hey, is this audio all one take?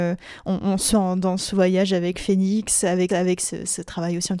no; 2 cuts; at 0.9 s, 3.1 s

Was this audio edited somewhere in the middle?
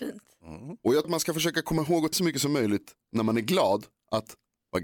yes; 2 cuts; at 1.0 s, 2.1 s

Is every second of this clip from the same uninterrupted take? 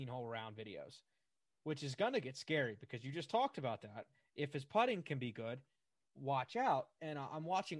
yes; 0 cuts

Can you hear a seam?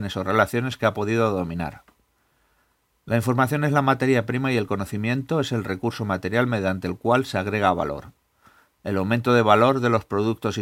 no; 0 cuts

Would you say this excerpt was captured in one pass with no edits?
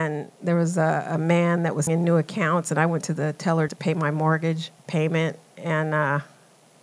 no; 3 cuts; at 1.9 s, 3.7 s, 4.8 s

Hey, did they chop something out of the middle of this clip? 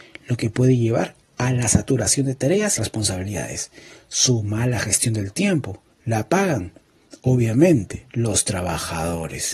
yes; 2 cuts; at 2.8 s, 8.1 s

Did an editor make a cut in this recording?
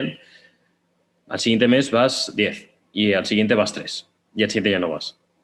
no; 0 cuts

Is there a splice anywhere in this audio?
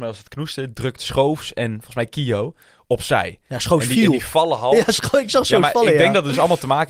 no; 0 cuts

